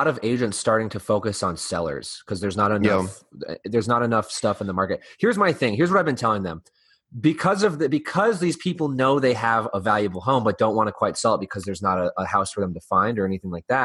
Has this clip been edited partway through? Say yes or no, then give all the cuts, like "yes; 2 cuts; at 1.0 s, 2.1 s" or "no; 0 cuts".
no; 0 cuts